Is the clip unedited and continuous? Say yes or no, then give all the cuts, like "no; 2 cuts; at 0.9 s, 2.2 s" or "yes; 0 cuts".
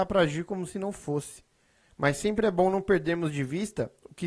yes; 0 cuts